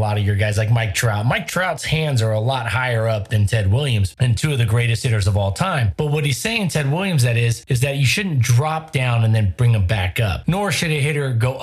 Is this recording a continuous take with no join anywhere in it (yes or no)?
yes